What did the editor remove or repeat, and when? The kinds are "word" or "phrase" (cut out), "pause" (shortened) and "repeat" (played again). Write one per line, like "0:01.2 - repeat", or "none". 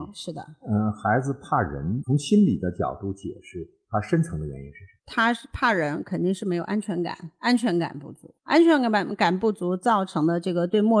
0:05.0 - pause
0:08.4 - pause